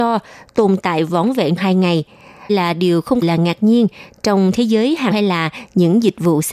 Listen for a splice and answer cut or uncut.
cut